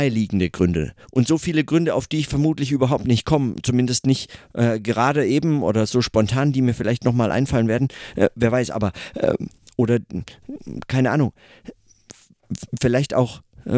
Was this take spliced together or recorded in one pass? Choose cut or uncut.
uncut